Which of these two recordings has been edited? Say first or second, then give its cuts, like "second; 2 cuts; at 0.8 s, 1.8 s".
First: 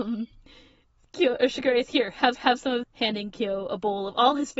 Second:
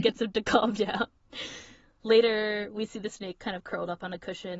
first; 3 cuts; at 1.9 s, 2.3 s, 2.8 s